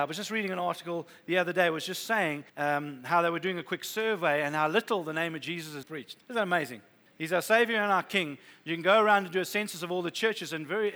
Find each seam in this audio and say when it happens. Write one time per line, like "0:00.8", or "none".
0:02.5
0:05.8
0:06.2
0:07.1

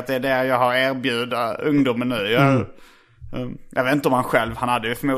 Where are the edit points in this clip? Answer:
none

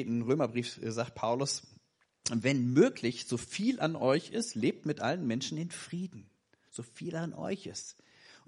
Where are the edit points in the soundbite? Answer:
none

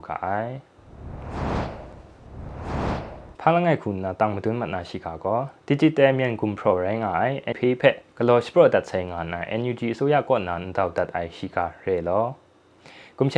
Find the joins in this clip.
0:03.4
0:07.5
0:08.1

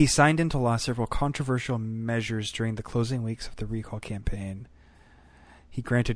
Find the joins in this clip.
none

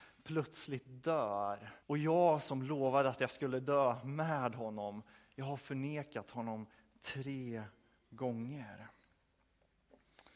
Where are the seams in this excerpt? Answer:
0:01.8

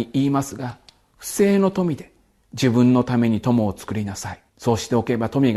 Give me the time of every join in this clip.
0:04.5

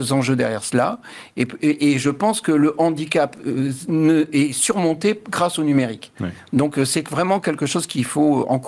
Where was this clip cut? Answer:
none

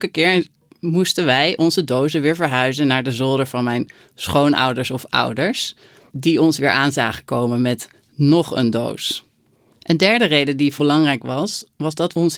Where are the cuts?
0:10.8

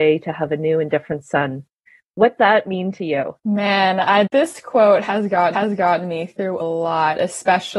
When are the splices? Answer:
0:02.4
0:03.4
0:04.3
0:05.5
0:06.6

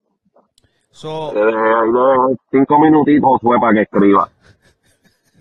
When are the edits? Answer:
0:01.4
0:02.4
0:03.2

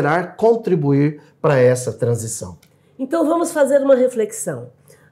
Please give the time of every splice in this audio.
none

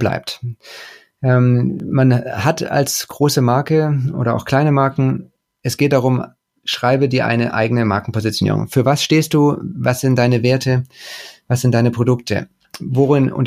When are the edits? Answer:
none

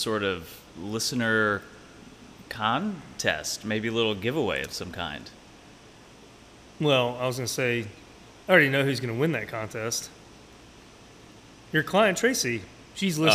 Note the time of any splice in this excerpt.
none

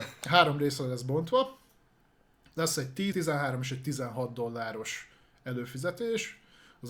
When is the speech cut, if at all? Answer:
0:03.1

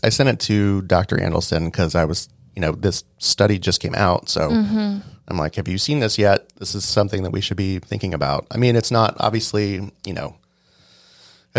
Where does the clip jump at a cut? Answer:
none

